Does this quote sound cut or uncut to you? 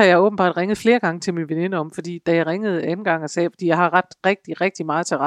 uncut